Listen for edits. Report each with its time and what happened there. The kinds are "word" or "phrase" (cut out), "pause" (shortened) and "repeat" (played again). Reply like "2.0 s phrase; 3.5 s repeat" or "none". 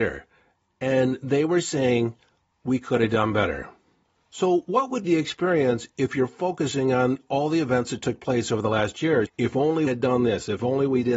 5.0 s word; 9.3 s word; 9.9 s word